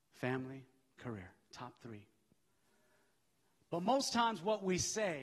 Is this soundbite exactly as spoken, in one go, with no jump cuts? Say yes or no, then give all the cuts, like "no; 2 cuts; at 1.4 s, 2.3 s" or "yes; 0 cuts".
yes; 0 cuts